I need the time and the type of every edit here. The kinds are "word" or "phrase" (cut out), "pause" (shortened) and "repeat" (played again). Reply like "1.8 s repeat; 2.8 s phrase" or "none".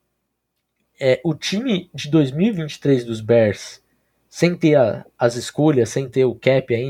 none